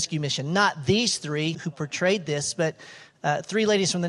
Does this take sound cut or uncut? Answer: cut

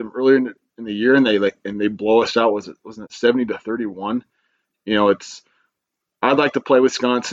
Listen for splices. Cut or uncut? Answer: uncut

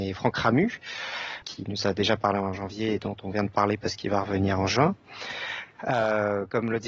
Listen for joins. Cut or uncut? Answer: cut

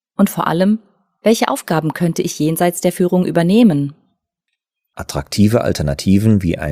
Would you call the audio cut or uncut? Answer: uncut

